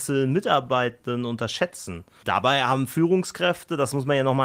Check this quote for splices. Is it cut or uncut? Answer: uncut